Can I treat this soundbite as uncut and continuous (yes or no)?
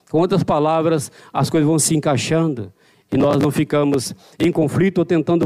yes